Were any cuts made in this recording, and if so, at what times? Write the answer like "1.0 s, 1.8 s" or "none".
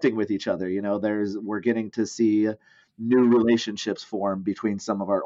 none